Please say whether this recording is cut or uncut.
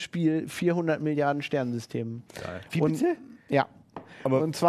uncut